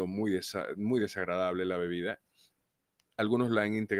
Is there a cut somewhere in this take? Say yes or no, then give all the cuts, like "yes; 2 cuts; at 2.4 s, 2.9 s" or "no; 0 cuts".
no; 0 cuts